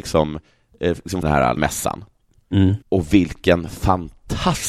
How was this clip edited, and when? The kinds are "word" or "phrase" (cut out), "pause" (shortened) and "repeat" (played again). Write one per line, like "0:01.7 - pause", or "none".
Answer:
0:01.2 - phrase
0:01.6 - word
0:02.8 - pause